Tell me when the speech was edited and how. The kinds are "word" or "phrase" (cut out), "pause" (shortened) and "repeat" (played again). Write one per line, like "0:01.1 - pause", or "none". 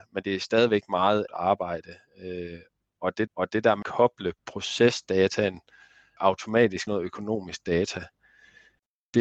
0:01.3 - word
0:03.3 - repeat
0:03.8 - word
0:04.4 - pause
0:06.2 - word
0:06.9 - word